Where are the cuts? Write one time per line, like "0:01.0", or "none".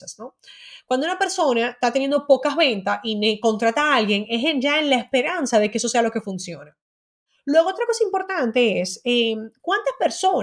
none